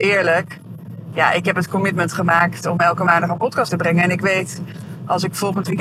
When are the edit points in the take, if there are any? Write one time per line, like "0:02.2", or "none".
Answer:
0:03.7